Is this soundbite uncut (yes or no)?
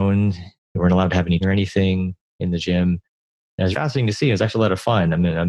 no